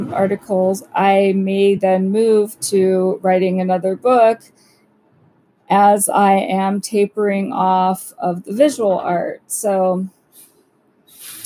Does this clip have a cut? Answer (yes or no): no